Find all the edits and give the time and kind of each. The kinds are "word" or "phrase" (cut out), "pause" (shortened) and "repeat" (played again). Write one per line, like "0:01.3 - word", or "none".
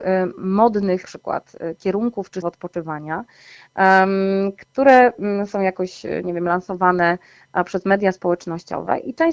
0:01.0 - word
0:02.4 - word